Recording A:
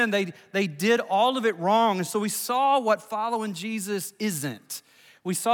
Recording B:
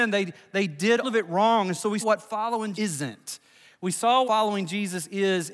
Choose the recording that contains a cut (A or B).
B